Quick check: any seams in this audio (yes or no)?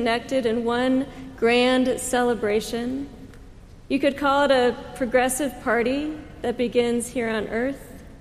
no